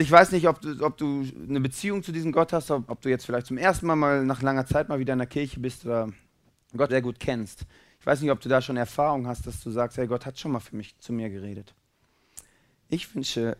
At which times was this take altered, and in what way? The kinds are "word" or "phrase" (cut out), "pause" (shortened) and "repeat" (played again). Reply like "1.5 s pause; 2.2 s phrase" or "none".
2.9 s word; 6.9 s word; 9.4 s word